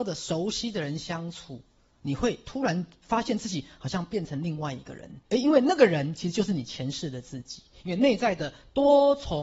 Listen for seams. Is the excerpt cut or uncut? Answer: cut